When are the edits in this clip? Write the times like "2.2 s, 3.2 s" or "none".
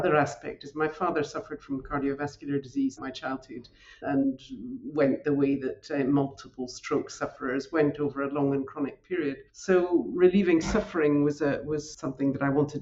3.0 s, 4.0 s, 9.5 s